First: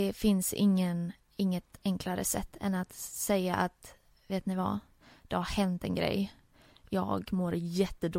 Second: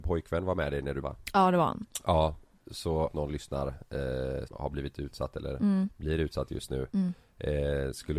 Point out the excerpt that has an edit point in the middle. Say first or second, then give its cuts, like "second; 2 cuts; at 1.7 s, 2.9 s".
second; 3 cuts; at 1.0 s, 3.1 s, 4.5 s